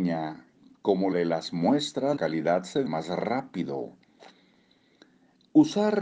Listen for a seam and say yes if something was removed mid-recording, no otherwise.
yes